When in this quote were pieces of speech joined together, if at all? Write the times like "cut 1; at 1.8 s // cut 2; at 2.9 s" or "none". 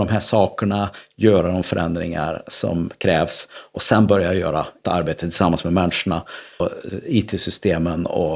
cut 1; at 4.8 s // cut 2; at 6.6 s